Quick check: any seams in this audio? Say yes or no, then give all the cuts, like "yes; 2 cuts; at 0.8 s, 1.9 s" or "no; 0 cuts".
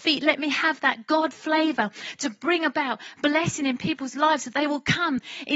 no; 0 cuts